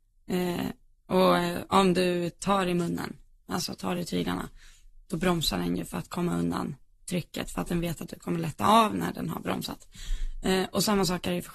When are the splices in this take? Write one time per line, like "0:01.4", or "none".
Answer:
none